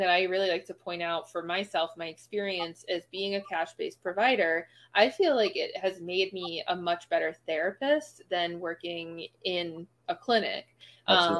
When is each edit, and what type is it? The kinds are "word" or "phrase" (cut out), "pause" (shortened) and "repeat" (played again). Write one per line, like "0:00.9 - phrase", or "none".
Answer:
none